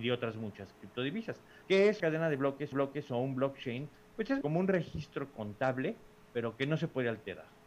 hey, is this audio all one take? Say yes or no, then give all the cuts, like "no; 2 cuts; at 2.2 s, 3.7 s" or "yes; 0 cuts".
no; 4 cuts; at 1.6 s, 2.0 s, 2.7 s, 4.4 s